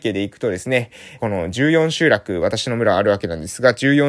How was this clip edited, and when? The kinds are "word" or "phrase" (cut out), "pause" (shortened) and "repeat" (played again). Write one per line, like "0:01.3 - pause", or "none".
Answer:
0:01.2 - phrase